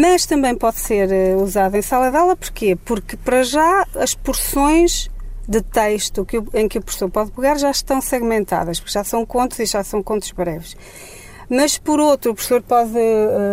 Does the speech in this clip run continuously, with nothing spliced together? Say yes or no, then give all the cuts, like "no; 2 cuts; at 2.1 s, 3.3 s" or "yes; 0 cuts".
yes; 0 cuts